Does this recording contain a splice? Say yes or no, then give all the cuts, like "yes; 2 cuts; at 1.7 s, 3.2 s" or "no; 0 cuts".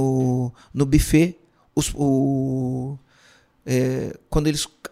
no; 0 cuts